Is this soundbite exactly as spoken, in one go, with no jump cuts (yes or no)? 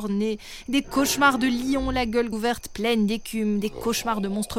no